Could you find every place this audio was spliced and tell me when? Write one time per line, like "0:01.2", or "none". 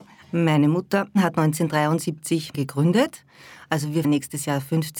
0:02.5
0:04.0